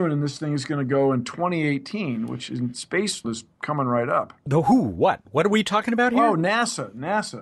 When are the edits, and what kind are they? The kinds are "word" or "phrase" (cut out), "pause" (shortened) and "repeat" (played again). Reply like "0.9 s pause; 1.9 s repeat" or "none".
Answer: 3.2 s word; 4.5 s word